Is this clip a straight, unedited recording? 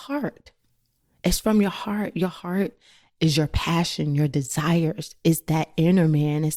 yes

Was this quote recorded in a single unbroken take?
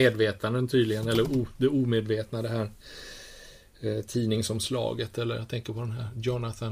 yes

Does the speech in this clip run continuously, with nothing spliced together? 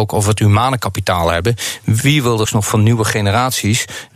no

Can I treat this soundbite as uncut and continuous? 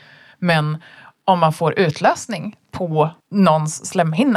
no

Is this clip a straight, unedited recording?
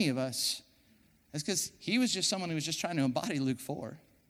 yes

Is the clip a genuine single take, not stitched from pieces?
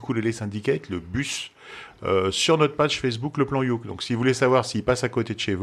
yes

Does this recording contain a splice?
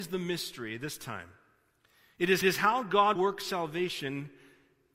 yes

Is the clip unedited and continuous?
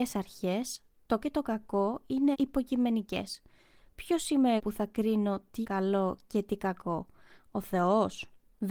no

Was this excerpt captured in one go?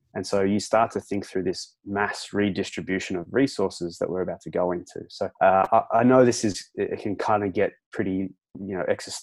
no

